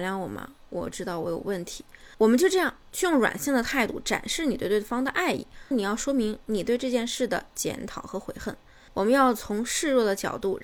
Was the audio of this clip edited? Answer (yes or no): yes